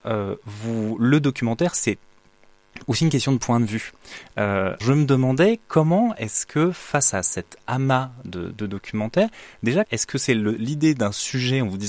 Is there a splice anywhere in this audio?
yes; 2 cuts; at 4.8 s, 9.8 s

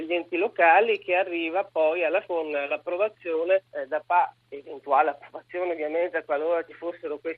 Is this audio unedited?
no; 2 cuts; at 2.3 s, 3.7 s

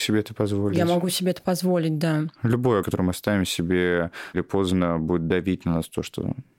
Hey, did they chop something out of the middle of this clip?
yes; 2 cuts; at 2.8 s, 4.3 s

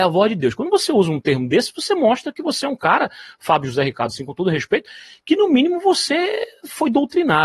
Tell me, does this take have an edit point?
no; 0 cuts

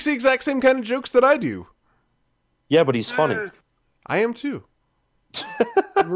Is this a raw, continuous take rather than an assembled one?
yes; 0 cuts

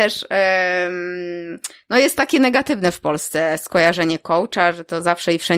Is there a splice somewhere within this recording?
no; 0 cuts

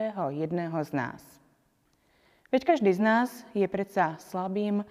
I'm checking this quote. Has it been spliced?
no; 0 cuts

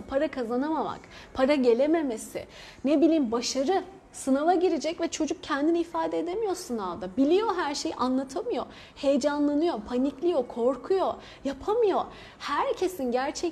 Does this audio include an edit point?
no; 0 cuts

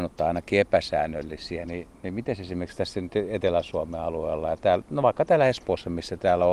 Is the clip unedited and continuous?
yes; 0 cuts

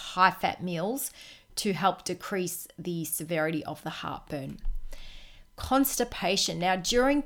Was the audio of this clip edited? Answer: no; 0 cuts

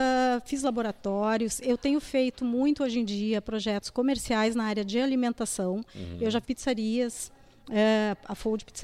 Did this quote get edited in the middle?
yes; 1 cut; at 6.4 s

